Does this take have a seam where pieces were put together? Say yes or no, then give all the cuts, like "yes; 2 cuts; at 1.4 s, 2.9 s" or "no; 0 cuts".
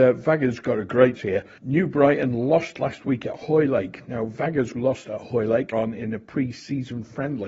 yes; 3 cuts; at 1.1 s, 4.7 s, 5.7 s